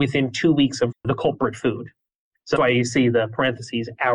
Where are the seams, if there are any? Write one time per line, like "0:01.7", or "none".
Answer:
0:00.9
0:02.6